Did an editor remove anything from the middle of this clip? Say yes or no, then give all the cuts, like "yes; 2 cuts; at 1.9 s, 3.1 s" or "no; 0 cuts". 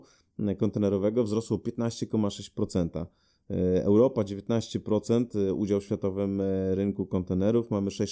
no; 0 cuts